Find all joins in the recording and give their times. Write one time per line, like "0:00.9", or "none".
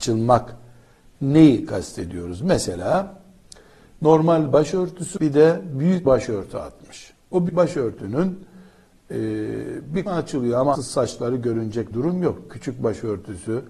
0:05.2
0:06.0
0:07.5
0:10.1
0:10.7
0:11.9